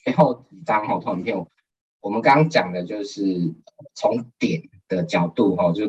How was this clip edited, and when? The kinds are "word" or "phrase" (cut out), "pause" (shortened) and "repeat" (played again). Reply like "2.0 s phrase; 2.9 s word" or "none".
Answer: none